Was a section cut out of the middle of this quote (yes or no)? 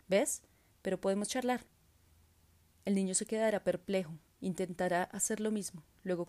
no